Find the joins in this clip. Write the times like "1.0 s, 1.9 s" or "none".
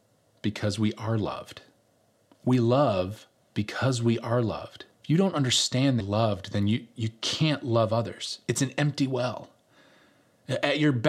1.8 s, 3.3 s, 4.9 s, 6.0 s